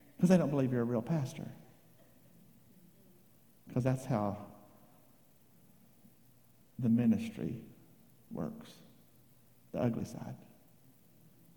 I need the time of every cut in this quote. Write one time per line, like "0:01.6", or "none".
none